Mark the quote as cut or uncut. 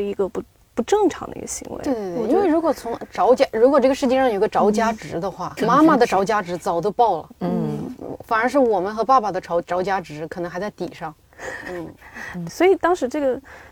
cut